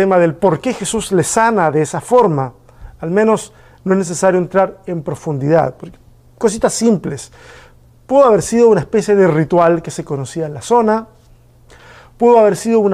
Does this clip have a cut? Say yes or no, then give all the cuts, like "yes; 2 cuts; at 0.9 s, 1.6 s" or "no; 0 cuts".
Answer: no; 0 cuts